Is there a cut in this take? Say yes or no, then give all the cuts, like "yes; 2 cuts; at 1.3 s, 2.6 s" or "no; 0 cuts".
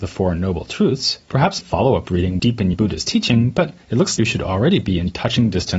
yes; 6 cuts; at 1.2 s, 1.6 s, 2.4 s, 2.7 s, 3.8 s, 4.2 s